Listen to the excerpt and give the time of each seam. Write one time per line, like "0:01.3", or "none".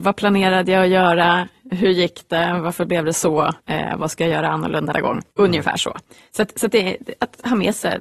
0:03.6
0:04.9
0:05.3

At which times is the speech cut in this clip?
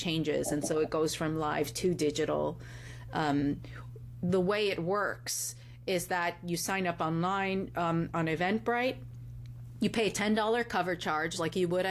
none

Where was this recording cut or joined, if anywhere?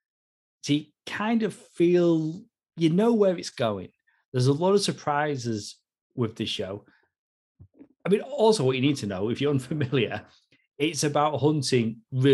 none

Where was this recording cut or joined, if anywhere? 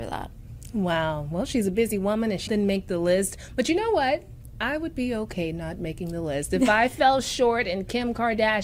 0:02.5

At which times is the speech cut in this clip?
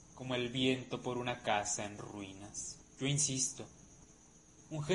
0:02.9

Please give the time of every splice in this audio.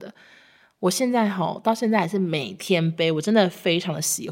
none

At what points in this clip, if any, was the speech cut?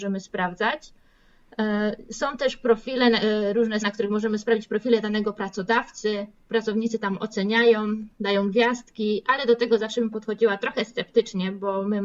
0:03.8

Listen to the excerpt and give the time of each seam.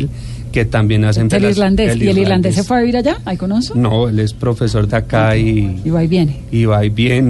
0:01.3
0:04.9

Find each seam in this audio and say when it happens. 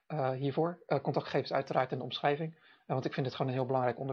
none

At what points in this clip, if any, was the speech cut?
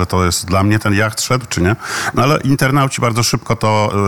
none

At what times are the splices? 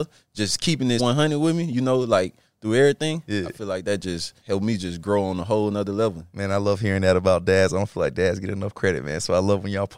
0:01.0
0:04.4

